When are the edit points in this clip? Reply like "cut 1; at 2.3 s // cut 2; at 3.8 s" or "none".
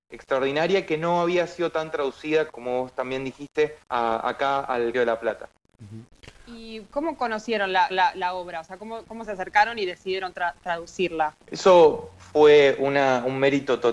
cut 1; at 2.5 s // cut 2; at 3.8 s // cut 3; at 4.9 s // cut 4; at 7.9 s // cut 5; at 11.4 s